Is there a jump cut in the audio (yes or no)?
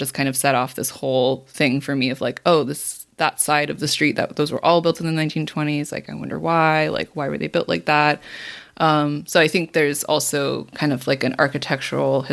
no